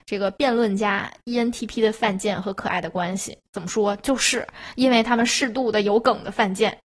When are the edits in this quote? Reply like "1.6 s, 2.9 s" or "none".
3.5 s